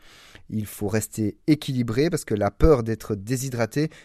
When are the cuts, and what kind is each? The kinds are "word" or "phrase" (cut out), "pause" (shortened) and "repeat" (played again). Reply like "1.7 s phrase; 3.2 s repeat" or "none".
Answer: none